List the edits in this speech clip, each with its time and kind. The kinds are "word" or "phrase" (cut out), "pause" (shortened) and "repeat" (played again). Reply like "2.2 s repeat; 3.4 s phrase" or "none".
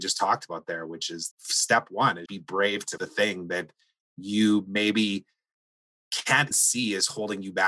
1.3 s word; 2.3 s word; 3.0 s word; 6.5 s word